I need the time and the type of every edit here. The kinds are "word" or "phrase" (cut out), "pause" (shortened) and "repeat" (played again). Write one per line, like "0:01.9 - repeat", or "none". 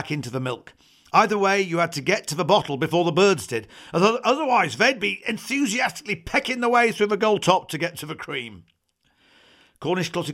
none